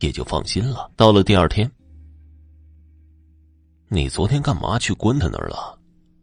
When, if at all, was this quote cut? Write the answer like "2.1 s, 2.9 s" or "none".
0.9 s

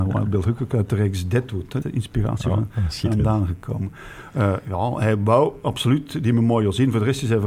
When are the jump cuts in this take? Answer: 1.8 s

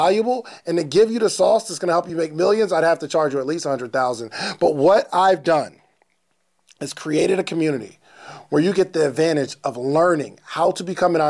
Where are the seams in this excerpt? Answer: none

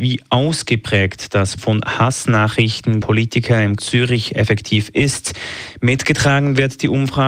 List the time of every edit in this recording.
1.6 s, 3.0 s, 3.8 s

